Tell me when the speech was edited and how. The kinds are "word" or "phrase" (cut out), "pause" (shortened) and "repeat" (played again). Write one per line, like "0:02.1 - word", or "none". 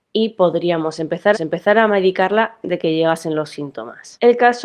0:01.3 - repeat
0:02.6 - word